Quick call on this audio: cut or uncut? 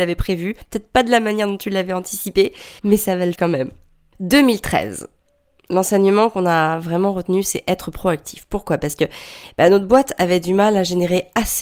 cut